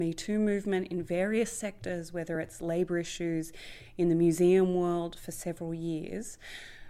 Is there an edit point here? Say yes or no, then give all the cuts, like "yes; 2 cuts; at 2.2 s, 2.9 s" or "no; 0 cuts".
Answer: no; 0 cuts